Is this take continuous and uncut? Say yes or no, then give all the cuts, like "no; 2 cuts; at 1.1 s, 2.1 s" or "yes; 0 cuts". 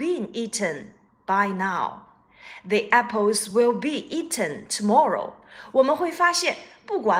yes; 0 cuts